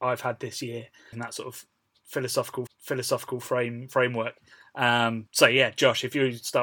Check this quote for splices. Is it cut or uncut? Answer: cut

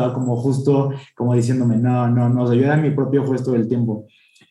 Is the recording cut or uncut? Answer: uncut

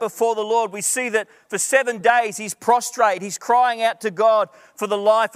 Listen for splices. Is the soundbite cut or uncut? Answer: uncut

